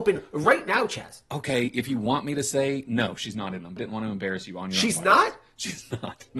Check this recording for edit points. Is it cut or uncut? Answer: cut